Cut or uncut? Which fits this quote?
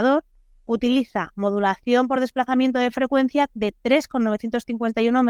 uncut